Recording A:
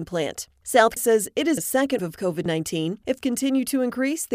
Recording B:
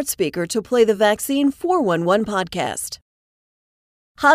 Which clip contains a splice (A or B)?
A